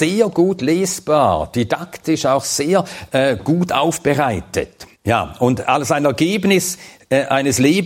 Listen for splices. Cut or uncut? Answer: cut